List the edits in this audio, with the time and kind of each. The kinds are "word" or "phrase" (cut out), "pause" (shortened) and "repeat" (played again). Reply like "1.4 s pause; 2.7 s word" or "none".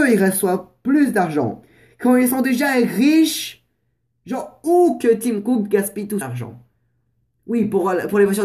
6.2 s word